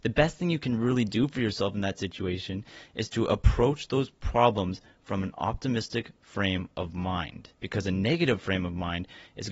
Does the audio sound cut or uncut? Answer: cut